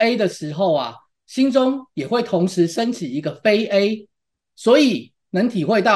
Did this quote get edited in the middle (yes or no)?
no